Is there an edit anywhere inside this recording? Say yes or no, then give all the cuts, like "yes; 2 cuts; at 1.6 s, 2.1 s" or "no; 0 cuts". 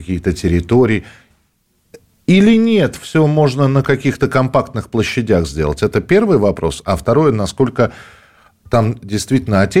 no; 0 cuts